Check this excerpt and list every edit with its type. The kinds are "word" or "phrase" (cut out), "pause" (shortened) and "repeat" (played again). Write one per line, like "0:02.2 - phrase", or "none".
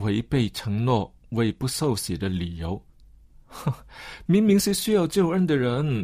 none